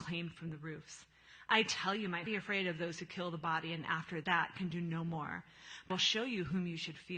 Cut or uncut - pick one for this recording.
cut